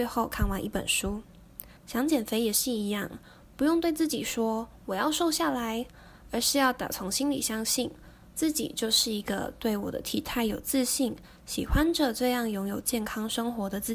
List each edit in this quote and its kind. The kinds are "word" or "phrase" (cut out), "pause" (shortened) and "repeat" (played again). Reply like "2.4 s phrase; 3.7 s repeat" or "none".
1.8 s pause